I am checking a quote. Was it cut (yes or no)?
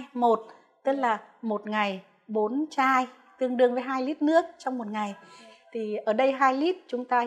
no